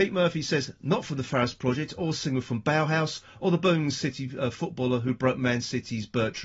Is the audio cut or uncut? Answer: uncut